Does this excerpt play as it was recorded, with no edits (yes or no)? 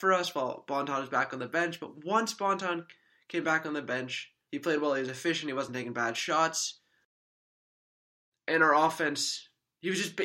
yes